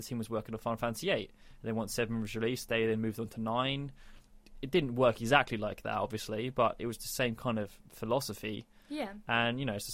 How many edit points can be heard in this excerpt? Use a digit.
0